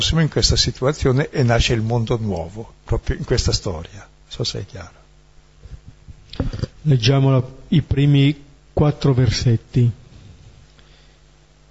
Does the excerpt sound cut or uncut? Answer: cut